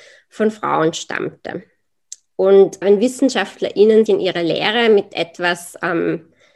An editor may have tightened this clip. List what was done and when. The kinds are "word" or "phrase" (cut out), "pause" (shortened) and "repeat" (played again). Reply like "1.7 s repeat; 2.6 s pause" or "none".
2.8 s word; 4.1 s word